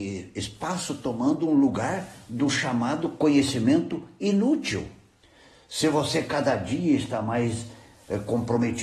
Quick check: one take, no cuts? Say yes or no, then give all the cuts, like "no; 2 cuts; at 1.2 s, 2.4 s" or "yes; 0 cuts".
yes; 0 cuts